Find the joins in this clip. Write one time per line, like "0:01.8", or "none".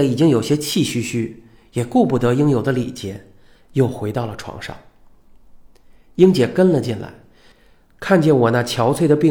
none